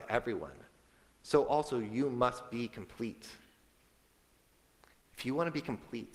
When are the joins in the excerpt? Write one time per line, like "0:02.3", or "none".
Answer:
none